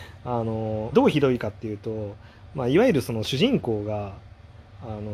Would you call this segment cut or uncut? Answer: cut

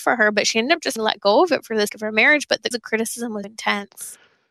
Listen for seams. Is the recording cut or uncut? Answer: cut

